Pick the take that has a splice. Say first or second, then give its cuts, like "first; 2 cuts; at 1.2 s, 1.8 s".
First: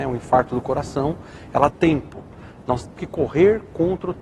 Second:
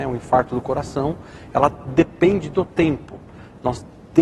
first; 2 cuts; at 1.7 s, 3.0 s